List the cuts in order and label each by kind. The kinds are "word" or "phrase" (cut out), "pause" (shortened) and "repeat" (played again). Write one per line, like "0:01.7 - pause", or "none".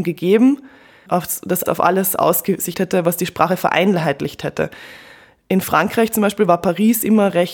0:01.1 - word
0:01.7 - word
0:02.7 - word